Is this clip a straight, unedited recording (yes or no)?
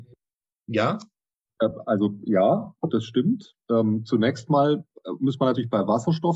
yes